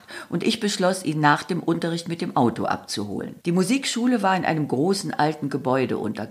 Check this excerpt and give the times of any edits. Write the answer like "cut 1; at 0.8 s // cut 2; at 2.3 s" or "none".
cut 1; at 3.4 s